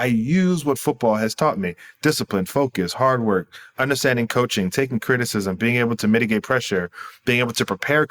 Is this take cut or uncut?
uncut